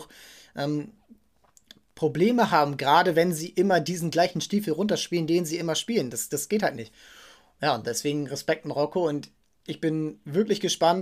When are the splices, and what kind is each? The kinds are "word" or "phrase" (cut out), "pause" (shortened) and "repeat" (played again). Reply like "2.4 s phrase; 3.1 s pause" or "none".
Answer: none